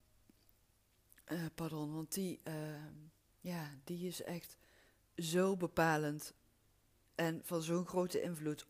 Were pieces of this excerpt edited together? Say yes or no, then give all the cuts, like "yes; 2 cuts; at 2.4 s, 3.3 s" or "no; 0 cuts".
yes; 1 cut; at 3.3 s